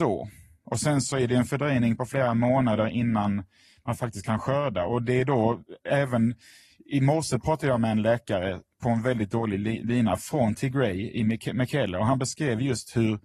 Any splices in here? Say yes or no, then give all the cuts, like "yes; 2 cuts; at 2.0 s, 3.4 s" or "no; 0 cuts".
no; 0 cuts